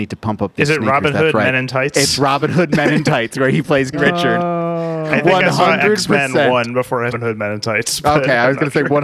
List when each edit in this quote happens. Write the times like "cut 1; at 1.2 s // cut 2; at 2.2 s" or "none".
cut 1; at 3.9 s // cut 2; at 7.1 s